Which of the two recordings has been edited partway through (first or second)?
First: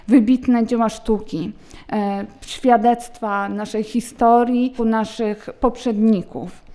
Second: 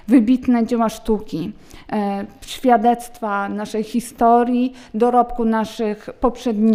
first